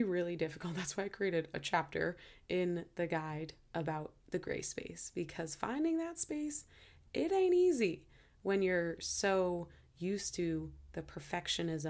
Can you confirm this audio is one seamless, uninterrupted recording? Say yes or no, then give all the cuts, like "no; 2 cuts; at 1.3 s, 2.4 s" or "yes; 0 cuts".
yes; 0 cuts